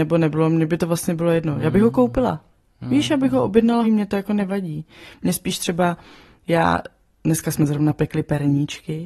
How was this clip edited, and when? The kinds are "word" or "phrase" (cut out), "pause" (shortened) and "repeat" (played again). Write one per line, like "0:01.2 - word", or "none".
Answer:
0:03.8 - word

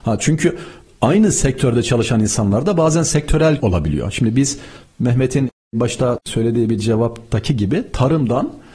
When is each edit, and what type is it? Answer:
0:03.6 - word

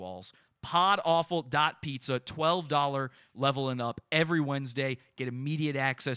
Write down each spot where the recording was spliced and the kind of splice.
none

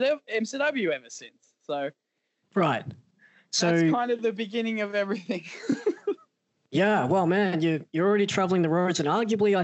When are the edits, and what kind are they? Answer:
none

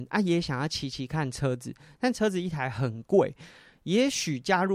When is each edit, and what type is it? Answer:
none

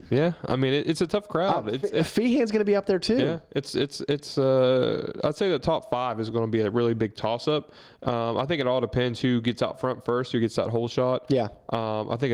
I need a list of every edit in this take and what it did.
none

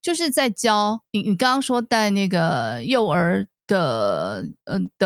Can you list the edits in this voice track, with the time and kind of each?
0:01.1 - pause

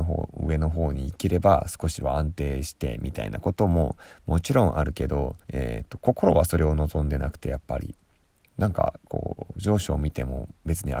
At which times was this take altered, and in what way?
0:05.4 - pause

